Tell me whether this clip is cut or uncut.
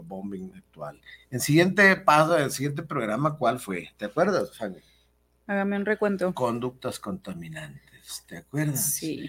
uncut